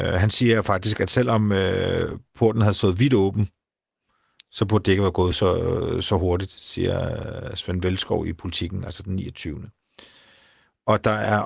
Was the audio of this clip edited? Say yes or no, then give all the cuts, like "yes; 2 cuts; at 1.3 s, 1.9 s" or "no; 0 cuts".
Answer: no; 0 cuts